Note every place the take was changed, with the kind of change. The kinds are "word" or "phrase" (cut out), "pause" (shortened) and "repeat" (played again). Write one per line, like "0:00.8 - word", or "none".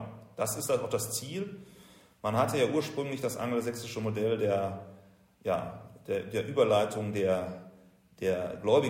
none